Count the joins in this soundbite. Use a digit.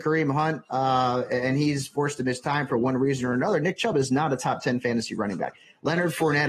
0